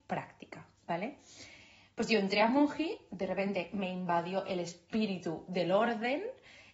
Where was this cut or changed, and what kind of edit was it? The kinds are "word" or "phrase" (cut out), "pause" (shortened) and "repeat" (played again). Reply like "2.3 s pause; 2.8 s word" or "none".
none